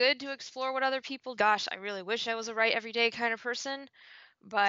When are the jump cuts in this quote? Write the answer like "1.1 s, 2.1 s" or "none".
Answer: 1.4 s

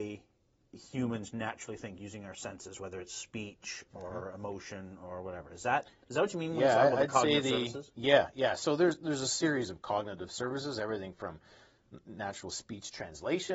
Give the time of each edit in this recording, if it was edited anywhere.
none

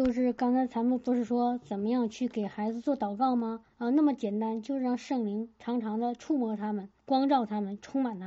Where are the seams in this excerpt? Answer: 3.7 s, 7.0 s

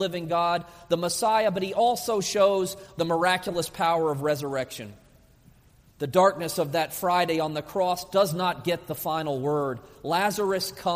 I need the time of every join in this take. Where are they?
none

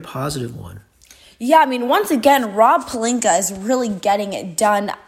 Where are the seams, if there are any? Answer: none

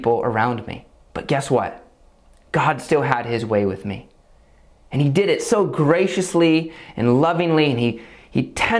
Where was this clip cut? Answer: 0.9 s

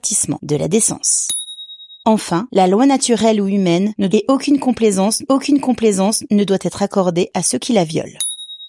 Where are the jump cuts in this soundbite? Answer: 2.0 s, 4.1 s, 5.3 s

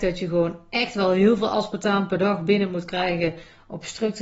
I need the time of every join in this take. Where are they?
none

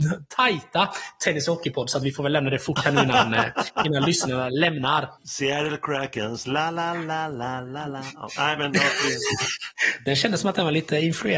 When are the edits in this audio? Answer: 5.2 s

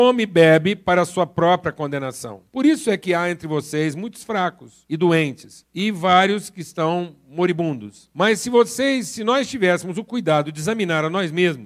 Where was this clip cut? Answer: none

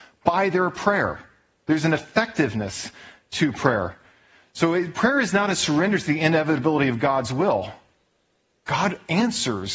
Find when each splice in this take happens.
none

